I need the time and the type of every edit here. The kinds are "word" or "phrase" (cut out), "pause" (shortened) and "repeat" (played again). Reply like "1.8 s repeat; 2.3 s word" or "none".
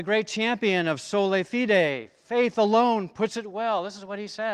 none